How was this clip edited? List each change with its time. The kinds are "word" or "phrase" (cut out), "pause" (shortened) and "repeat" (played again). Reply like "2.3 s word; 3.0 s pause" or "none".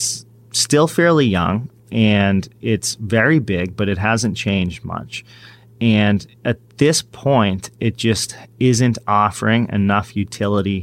6.4 s pause